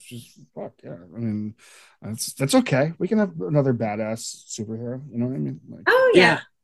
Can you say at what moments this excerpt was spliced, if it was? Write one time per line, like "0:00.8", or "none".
none

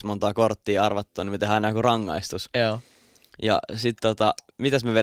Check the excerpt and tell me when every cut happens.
none

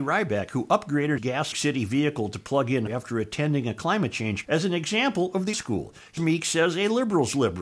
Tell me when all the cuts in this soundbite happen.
0:01.2
0:01.5
0:02.9
0:04.4
0:05.5
0:06.2

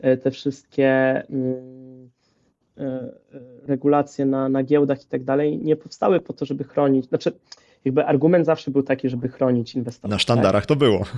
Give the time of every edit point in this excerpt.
none

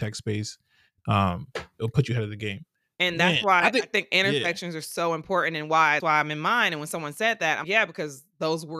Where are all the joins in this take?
0:06.0
0:07.6

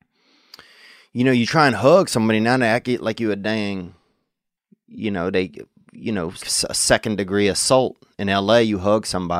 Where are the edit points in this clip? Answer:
0:04.6
0:06.4

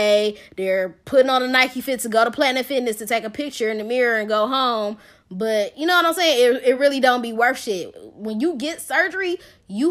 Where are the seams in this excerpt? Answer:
none

